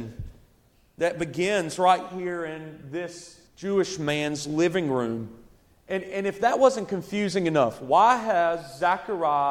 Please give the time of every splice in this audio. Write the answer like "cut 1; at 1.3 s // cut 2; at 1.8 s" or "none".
cut 1; at 3.5 s // cut 2; at 5.5 s

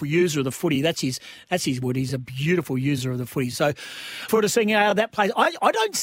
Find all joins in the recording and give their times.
cut 1; at 1.8 s // cut 2; at 4.3 s

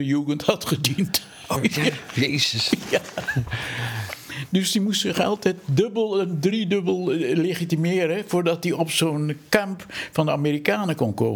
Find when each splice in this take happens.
cut 1; at 1.6 s

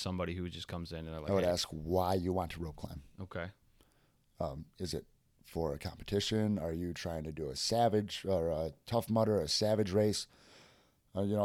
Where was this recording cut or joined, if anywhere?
none

